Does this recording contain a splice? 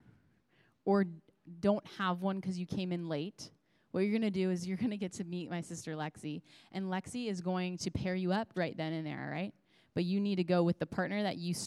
yes; 1 cut; at 8.5 s

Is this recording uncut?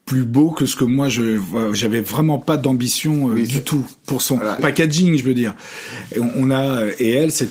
no; 1 cut; at 4.6 s

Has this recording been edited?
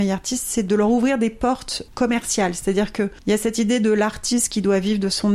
no; 0 cuts

